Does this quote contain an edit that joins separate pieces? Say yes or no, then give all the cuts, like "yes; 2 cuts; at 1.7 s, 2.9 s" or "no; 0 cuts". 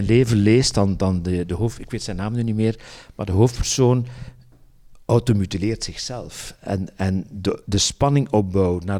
no; 0 cuts